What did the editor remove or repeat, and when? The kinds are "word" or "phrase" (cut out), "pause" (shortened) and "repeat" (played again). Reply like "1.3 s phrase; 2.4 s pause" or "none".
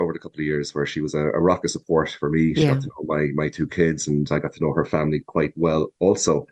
none